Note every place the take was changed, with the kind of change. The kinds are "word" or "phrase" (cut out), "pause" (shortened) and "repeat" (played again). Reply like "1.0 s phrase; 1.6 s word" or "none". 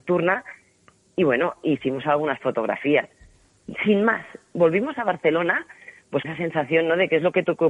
6.2 s word